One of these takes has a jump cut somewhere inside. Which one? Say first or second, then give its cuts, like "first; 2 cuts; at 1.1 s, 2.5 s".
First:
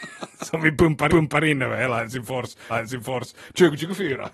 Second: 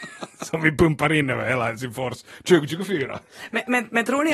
first; 2 cuts; at 1.1 s, 2.7 s